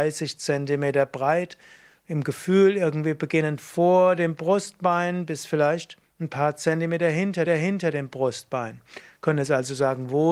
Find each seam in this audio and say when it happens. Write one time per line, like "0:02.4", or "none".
0:07.5